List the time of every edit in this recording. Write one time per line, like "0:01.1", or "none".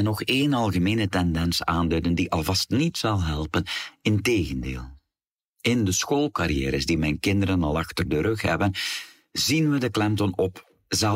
none